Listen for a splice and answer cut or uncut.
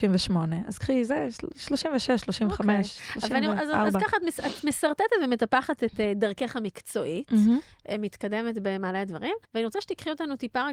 cut